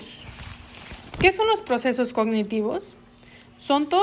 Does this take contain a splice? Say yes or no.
no